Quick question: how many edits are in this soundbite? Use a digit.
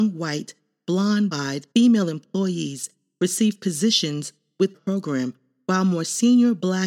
3